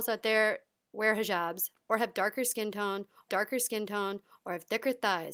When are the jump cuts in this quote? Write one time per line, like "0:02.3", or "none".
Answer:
0:03.3